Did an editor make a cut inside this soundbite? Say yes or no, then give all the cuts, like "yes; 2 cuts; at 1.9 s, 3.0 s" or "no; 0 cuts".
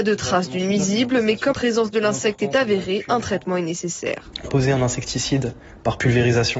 yes; 2 cuts; at 1.5 s, 4.5 s